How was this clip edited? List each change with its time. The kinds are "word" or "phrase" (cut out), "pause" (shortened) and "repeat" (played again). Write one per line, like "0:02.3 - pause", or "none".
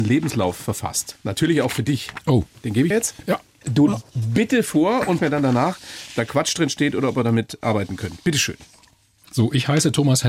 0:02.9 - phrase
0:03.9 - phrase
0:05.2 - word